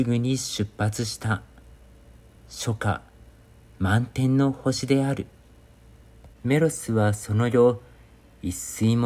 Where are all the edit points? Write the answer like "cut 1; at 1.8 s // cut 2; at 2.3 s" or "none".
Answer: cut 1; at 6.3 s

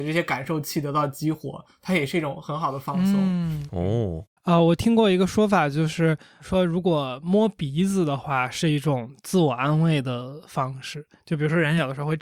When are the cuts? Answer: cut 1; at 4.4 s

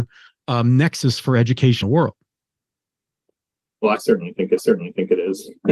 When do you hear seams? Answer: cut 1; at 1.8 s // cut 2; at 4.6 s

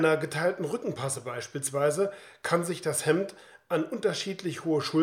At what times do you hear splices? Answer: none

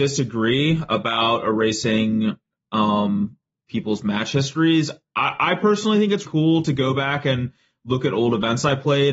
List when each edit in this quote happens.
cut 1; at 6.2 s

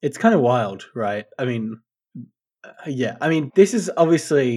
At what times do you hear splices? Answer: cut 1; at 3.5 s

